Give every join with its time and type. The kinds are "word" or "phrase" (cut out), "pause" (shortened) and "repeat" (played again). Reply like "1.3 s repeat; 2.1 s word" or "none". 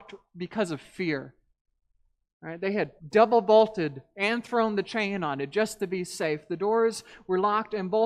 3.0 s pause